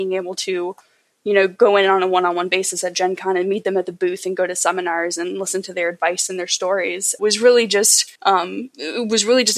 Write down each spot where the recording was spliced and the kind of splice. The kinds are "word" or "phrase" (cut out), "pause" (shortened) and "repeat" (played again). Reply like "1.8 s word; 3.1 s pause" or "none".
7.2 s word; 8.1 s pause